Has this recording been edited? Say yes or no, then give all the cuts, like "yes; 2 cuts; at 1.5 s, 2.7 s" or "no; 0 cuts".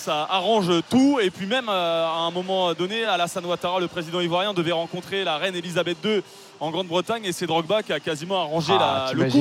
no; 0 cuts